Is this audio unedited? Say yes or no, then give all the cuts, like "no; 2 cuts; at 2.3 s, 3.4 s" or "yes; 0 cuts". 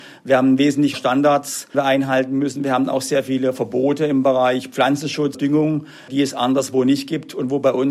no; 3 cuts; at 0.9 s, 1.7 s, 5.3 s